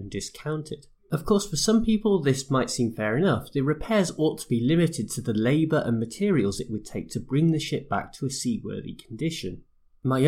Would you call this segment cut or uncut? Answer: cut